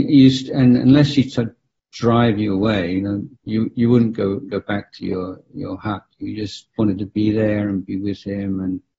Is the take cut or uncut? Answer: cut